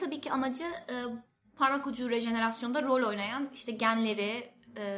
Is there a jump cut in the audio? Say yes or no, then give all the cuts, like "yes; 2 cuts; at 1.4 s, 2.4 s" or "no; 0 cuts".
no; 0 cuts